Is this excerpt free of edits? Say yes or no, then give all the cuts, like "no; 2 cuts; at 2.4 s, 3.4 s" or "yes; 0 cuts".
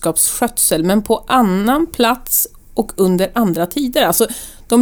yes; 0 cuts